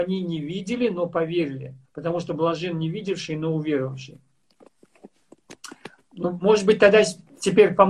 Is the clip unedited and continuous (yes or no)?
no